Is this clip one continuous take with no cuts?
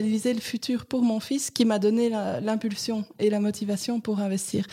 yes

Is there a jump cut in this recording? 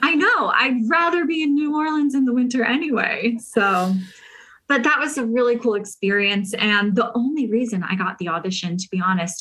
no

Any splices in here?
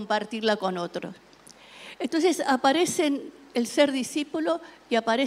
no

